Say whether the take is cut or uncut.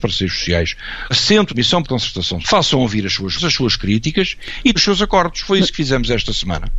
cut